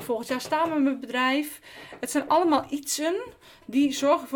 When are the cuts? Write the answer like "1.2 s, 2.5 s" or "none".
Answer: none